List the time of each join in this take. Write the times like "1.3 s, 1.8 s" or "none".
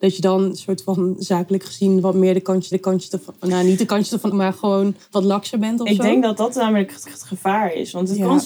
2.7 s, 4.3 s, 7.1 s